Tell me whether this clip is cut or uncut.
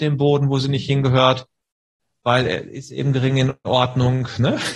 uncut